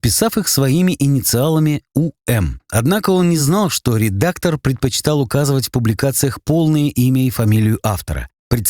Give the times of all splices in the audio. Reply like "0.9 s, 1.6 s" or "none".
none